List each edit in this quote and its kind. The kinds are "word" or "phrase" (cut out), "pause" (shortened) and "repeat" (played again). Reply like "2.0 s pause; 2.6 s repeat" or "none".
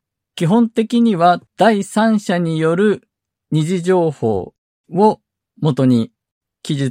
1.5 s pause